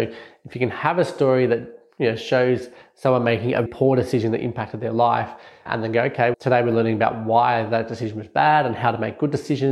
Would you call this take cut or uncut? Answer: cut